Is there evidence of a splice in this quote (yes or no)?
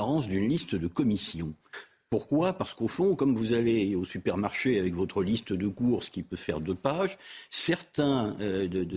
no